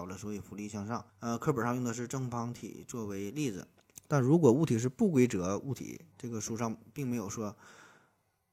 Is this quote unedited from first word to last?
no; 2 cuts; at 1.1 s, 6.1 s

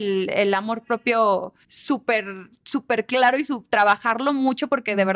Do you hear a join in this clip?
yes; 1 cut; at 1.6 s

